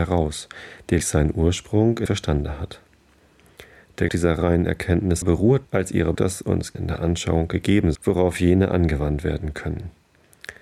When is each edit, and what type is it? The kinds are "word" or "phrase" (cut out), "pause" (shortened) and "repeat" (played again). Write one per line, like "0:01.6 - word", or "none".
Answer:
0:01.0 - word
0:02.1 - word
0:04.1 - word
0:05.2 - word
0:05.6 - word
0:06.1 - word
0:06.7 - word
0:07.9 - word